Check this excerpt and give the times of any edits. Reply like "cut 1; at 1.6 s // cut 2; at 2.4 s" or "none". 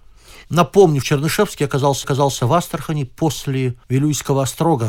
cut 1; at 1.0 s // cut 2; at 2.0 s // cut 3; at 3.8 s